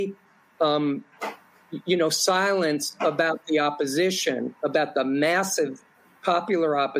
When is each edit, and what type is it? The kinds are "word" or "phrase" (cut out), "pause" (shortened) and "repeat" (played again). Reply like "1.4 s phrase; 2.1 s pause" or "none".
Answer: none

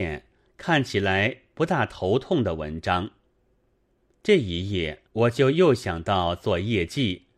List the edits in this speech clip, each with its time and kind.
5.1 s pause

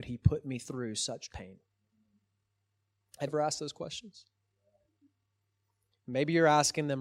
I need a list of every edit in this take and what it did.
1.3 s word; 3.3 s word

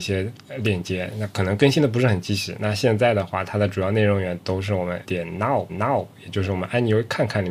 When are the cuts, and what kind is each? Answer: 5.0 s word; 5.7 s repeat

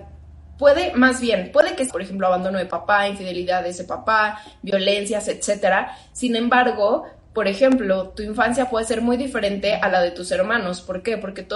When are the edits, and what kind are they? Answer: 1.9 s phrase

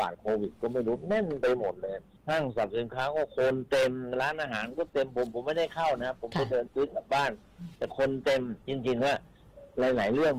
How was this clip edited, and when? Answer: 2.2 s pause; 8.6 s pause

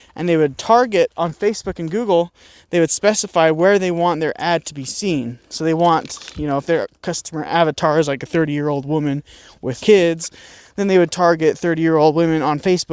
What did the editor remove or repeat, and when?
9.8 s word

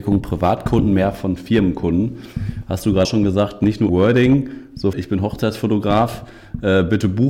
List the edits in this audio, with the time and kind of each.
3.0 s word; 3.9 s word; 4.9 s phrase

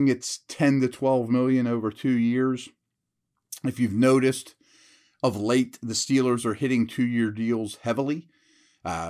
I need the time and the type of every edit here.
none

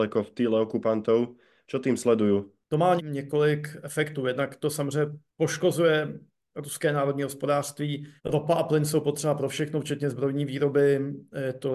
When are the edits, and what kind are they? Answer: 3.0 s word; 8.2 s pause

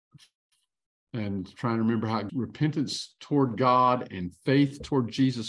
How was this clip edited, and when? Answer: 2.3 s word

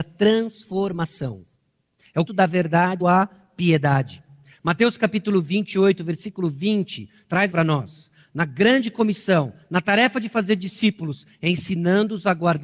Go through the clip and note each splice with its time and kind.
2.0 s pause; 2.3 s word; 3.0 s word; 7.5 s phrase

